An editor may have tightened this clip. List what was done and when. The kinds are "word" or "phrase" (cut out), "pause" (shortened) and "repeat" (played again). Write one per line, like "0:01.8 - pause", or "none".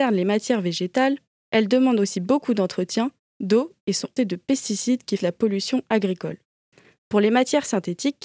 0:04.2 - word
0:05.2 - word